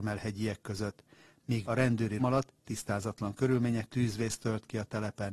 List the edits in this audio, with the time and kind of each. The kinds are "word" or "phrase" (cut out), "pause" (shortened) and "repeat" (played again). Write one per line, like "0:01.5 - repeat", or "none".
0:01.6 - word
0:02.2 - word
0:03.9 - word